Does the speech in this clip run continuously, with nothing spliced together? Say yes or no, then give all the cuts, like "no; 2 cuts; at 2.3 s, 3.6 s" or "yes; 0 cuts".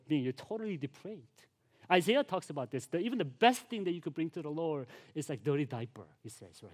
yes; 0 cuts